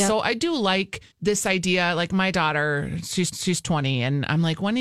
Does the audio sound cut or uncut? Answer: cut